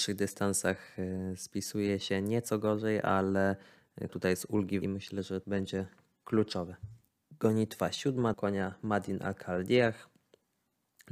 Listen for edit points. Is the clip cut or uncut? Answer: cut